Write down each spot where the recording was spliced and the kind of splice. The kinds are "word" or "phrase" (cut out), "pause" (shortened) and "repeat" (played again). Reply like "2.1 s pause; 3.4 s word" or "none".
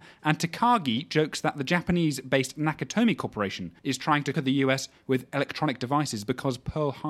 3.8 s pause; 4.3 s word